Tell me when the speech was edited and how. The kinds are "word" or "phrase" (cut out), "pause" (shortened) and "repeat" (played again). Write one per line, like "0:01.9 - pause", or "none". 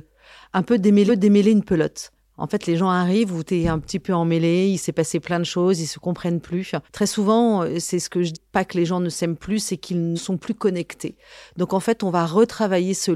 0:01.1 - repeat
0:02.2 - pause
0:03.5 - word
0:06.8 - pause
0:08.3 - phrase
0:10.2 - word